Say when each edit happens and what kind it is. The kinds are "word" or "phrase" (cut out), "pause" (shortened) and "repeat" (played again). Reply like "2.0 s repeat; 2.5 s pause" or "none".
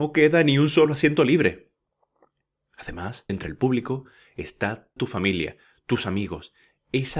3.3 s phrase; 5.0 s word